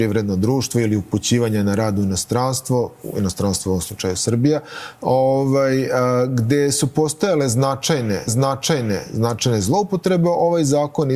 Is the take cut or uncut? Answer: cut